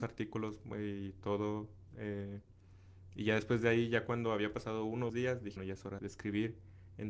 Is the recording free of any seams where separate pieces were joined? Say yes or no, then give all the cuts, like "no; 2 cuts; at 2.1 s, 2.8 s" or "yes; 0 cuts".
no; 3 cuts; at 5.1 s, 5.6 s, 6.0 s